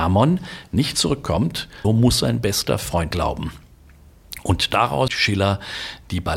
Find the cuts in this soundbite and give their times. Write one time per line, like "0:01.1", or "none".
0:00.9
0:01.8
0:03.1
0:05.1